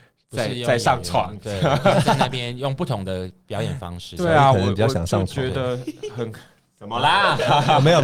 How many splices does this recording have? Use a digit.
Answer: 0